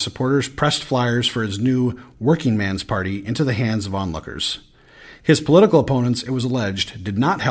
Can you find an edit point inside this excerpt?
no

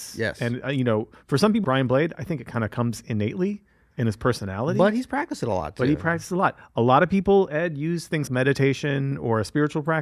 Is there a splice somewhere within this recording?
yes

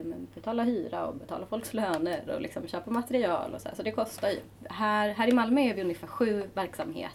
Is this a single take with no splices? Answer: yes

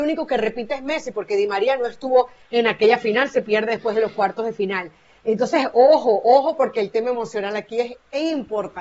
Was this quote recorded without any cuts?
yes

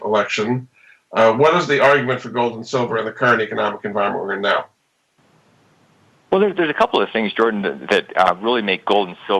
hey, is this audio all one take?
yes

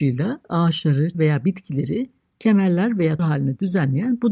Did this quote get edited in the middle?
yes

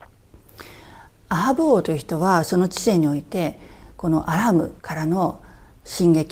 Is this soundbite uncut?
no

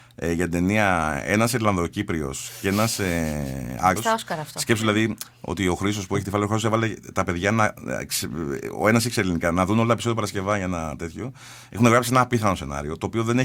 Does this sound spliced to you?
yes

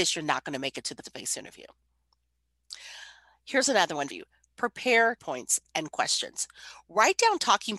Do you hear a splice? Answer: yes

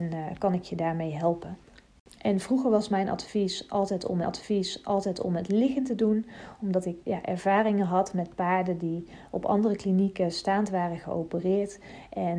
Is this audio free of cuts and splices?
no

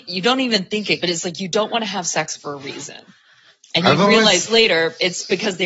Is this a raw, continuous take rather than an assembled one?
no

